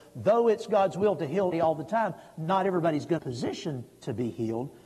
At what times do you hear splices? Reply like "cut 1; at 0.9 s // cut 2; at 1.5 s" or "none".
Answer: cut 1; at 1.5 s // cut 2; at 3.2 s

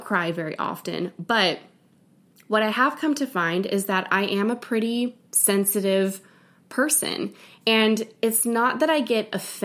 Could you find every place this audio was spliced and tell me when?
none

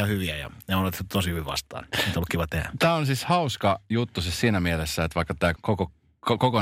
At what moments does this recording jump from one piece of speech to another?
cut 1; at 5.5 s

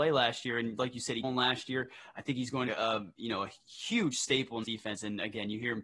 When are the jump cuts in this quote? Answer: cut 1; at 1.2 s // cut 2; at 2.7 s // cut 3; at 4.6 s

